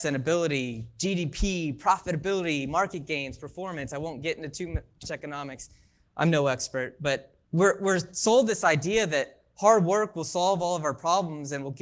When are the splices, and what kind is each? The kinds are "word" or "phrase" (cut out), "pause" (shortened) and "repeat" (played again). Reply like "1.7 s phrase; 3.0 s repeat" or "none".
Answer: 5.0 s word; 7.4 s pause